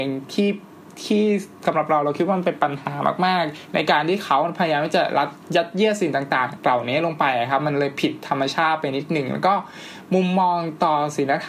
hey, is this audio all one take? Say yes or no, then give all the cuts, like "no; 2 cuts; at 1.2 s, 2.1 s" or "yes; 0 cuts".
no; 1 cut; at 6.6 s